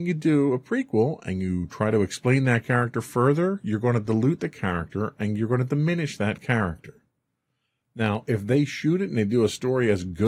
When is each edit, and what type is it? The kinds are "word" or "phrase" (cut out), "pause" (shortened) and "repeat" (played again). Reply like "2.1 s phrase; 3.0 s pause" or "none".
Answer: none